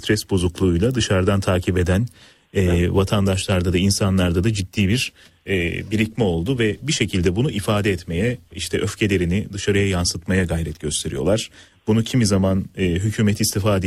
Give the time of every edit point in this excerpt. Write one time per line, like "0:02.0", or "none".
none